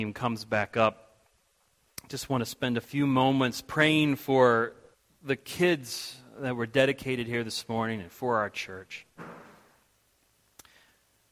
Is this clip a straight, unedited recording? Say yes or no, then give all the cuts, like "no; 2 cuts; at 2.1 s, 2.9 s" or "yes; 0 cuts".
no; 1 cut; at 4.9 s